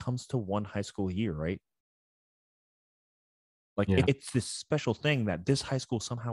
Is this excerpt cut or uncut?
cut